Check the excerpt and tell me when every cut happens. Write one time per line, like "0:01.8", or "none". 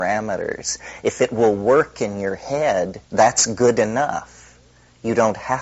0:03.0